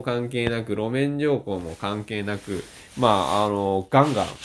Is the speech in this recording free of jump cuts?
no; 1 cut; at 2.9 s

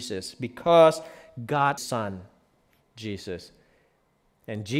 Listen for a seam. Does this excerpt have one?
yes; 1 cut; at 1.8 s

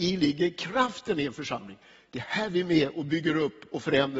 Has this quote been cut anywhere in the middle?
no; 0 cuts

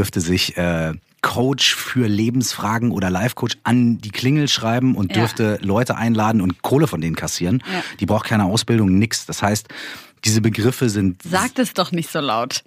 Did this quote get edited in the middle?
no; 0 cuts

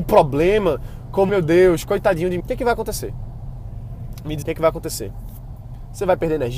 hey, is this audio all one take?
no; 3 cuts; at 1.3 s, 2.4 s, 4.4 s

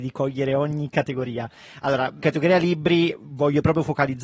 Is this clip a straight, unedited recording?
no; 1 cut; at 2.2 s

